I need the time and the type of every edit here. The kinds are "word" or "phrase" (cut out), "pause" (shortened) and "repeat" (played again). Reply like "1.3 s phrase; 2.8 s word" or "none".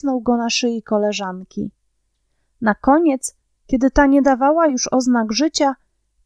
none